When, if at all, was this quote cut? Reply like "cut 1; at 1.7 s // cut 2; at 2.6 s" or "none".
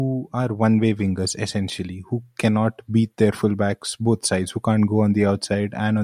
none